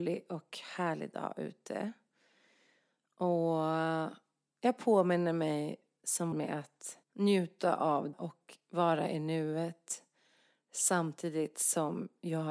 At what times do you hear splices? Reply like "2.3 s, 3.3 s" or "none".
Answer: 6.3 s, 7.0 s, 8.1 s